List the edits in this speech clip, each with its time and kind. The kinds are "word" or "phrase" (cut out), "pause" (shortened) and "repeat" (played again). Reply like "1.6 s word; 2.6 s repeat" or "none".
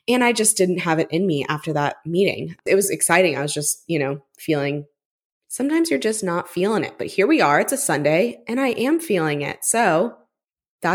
none